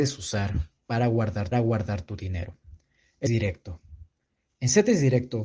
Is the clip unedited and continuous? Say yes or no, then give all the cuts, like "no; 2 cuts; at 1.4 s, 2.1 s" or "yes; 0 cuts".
no; 2 cuts; at 1.5 s, 3.3 s